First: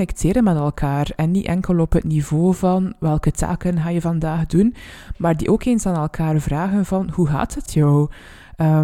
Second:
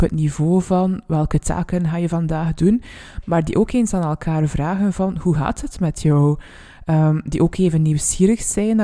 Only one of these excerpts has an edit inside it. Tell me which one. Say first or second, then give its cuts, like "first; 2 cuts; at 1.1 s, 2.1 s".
first; 1 cut; at 7.7 s